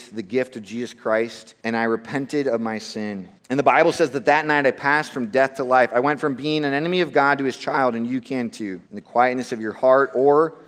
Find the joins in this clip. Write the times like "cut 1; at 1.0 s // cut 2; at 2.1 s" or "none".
cut 1; at 1.6 s // cut 2; at 3.4 s // cut 3; at 8.9 s